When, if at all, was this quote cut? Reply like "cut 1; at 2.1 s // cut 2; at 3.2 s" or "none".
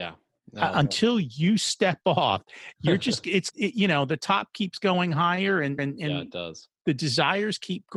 cut 1; at 3.5 s // cut 2; at 5.8 s